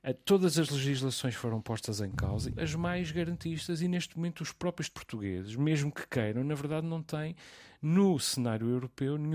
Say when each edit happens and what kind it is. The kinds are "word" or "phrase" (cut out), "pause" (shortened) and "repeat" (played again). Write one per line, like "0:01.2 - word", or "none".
0:02.5 - word
0:04.9 - word